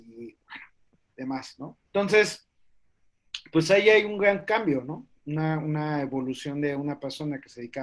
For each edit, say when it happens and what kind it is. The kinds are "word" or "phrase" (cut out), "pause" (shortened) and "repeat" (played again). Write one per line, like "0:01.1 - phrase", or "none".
0:01.9 - pause